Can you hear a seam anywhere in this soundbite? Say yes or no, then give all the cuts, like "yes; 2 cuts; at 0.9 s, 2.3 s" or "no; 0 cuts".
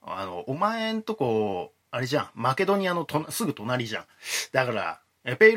no; 0 cuts